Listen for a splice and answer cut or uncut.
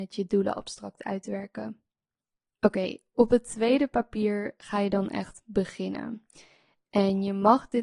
uncut